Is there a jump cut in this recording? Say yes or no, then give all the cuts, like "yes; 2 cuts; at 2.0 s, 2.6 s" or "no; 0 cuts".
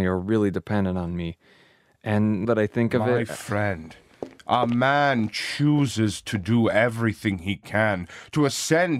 yes; 2 cuts; at 2.4 s, 4.4 s